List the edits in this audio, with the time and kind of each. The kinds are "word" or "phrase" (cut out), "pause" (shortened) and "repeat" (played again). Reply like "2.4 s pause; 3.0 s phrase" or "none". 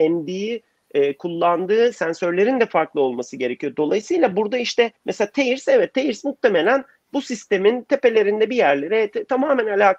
5.0 s pause